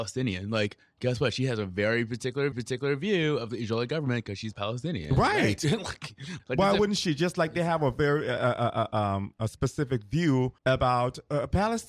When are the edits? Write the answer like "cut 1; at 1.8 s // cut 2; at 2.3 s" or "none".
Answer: cut 1; at 2.5 s // cut 2; at 6.4 s // cut 3; at 10.6 s